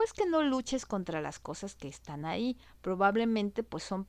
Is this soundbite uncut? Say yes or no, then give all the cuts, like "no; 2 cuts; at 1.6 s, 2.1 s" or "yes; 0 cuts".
yes; 0 cuts